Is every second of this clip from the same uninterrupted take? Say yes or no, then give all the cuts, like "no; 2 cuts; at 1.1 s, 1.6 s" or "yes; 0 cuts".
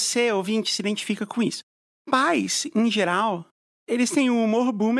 yes; 0 cuts